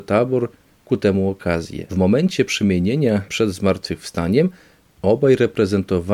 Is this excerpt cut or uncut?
cut